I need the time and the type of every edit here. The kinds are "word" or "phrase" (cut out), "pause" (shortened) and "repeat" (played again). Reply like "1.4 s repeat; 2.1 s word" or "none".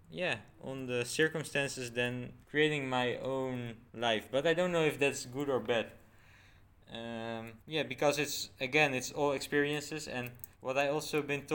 2.4 s pause; 3.9 s pause; 7.6 s pause; 10.5 s pause